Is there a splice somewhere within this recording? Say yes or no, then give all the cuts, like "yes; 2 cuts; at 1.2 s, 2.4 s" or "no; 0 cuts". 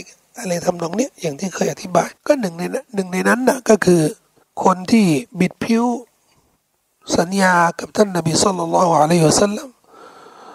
yes; 3 cuts; at 2.2 s, 4.4 s, 5.3 s